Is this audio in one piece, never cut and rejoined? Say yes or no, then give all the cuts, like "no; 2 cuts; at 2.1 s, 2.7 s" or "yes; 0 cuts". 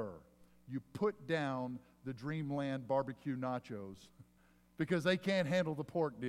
yes; 0 cuts